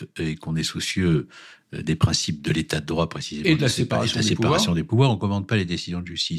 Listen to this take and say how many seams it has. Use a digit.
0